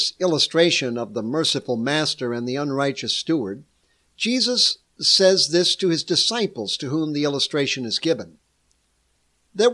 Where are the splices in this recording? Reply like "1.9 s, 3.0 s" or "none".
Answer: none